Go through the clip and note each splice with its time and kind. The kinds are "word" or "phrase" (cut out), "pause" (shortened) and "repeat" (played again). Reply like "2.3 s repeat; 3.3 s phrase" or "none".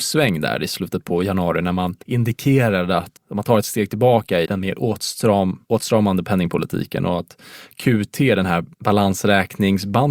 2.0 s pause; 3.2 s word; 4.4 s word; 5.6 s pause; 8.7 s pause